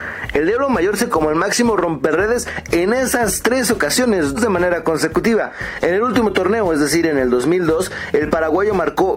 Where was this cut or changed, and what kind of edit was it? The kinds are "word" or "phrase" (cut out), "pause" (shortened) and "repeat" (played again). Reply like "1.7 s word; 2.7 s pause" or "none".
1.1 s phrase; 4.3 s word